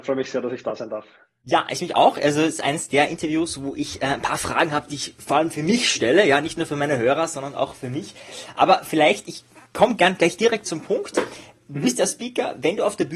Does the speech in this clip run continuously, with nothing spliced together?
yes; 0 cuts

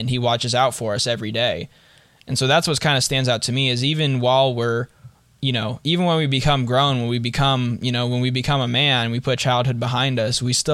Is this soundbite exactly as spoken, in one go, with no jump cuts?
yes; 0 cuts

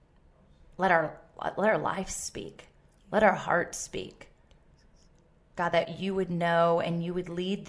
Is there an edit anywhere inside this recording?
no; 0 cuts

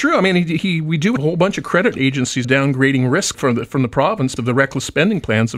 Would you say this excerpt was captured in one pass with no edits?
no; 4 cuts; at 1.2 s, 2.4 s, 3.3 s, 4.4 s

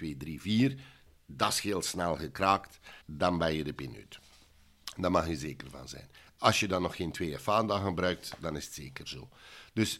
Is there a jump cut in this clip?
yes; 1 cut; at 3.0 s

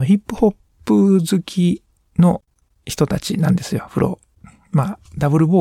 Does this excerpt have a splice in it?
no; 0 cuts

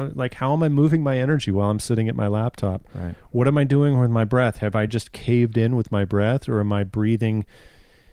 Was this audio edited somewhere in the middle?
no; 0 cuts

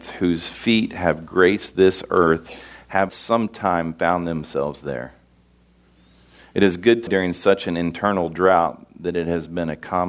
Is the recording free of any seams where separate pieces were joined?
no; 2 cuts; at 3.1 s, 7.1 s

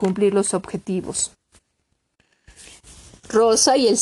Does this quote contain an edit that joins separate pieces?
no; 0 cuts

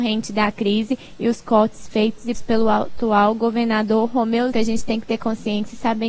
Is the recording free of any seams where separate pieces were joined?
no; 2 cuts; at 2.3 s, 4.5 s

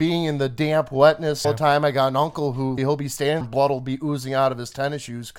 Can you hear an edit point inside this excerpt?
yes; 3 cuts; at 1.4 s, 2.8 s, 3.4 s

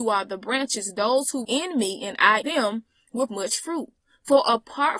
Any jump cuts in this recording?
yes; 3 cuts; at 1.4 s, 2.4 s, 3.3 s

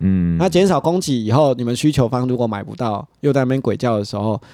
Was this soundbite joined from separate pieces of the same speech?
no; 0 cuts

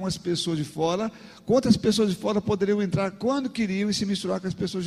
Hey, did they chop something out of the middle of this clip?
no; 0 cuts

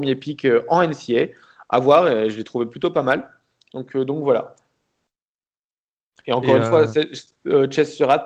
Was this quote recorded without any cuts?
yes; 0 cuts

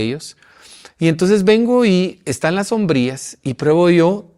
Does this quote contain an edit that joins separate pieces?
no; 0 cuts

